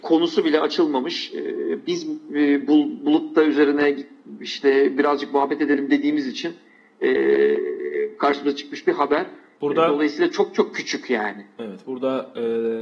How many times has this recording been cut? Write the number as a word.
zero